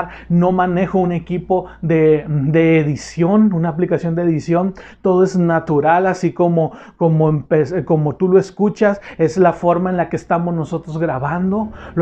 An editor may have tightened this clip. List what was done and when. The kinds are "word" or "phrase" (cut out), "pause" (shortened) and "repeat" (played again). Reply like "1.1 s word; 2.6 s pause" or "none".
none